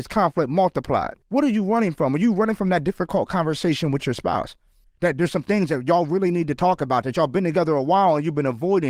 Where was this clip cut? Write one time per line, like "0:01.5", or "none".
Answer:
0:01.2
0:04.8